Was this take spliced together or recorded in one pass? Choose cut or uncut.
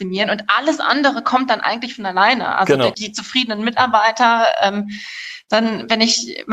cut